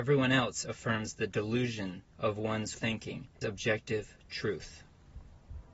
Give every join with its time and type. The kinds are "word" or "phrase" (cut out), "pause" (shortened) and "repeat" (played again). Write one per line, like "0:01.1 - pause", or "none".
0:02.1 - pause
0:02.7 - word
0:03.4 - word